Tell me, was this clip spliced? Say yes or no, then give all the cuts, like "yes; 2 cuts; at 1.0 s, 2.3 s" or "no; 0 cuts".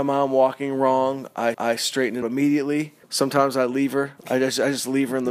yes; 4 cuts; at 1.5 s, 2.2 s, 3.0 s, 4.2 s